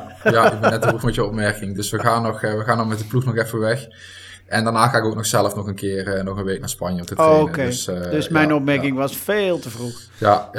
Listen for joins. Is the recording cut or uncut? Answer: uncut